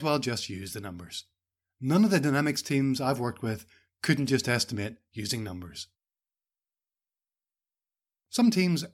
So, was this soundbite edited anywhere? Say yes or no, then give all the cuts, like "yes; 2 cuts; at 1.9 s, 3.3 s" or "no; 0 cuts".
no; 0 cuts